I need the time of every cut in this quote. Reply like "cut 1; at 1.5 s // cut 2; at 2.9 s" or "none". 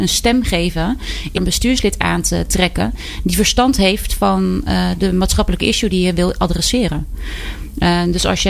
cut 1; at 1.4 s